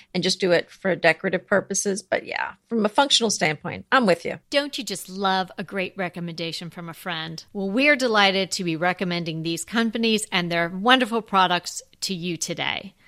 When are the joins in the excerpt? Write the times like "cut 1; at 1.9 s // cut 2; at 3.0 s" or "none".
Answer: cut 1; at 4.4 s // cut 2; at 7.5 s